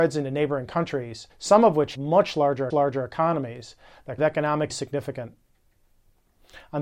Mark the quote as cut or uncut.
cut